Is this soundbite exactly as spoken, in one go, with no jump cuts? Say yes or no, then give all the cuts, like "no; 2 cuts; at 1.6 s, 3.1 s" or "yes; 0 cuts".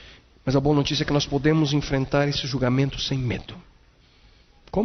yes; 0 cuts